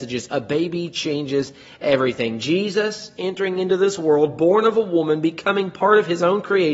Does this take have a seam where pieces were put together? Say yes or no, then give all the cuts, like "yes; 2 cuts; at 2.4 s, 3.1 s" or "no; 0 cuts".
no; 0 cuts